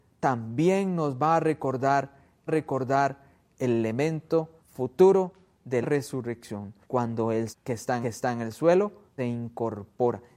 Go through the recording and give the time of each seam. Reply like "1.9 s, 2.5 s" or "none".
2.5 s, 4.6 s, 5.8 s, 6.8 s, 7.5 s, 8.0 s, 9.2 s

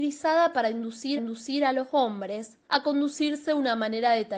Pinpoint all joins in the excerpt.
1.2 s, 2.6 s

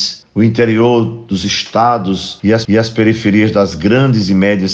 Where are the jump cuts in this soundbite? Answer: 2.6 s

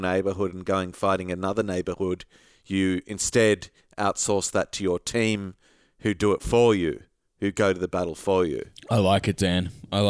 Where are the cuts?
none

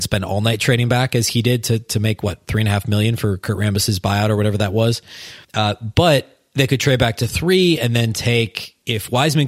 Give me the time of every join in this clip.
5.4 s

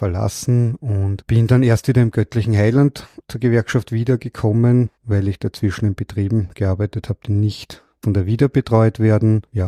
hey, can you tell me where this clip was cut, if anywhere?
4.9 s

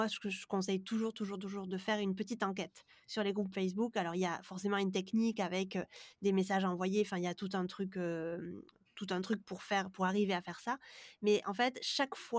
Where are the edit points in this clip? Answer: none

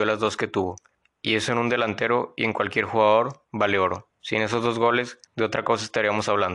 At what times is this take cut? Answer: 4.1 s, 5.3 s

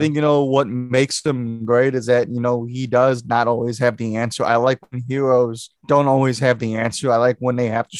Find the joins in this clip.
5.8 s

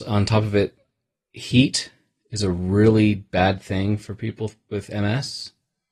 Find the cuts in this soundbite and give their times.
none

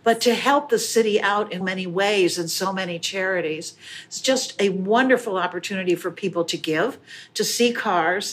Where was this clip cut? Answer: 1.6 s

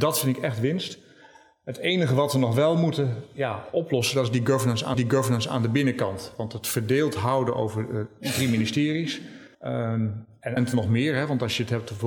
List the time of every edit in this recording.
4.9 s, 9.5 s, 10.6 s

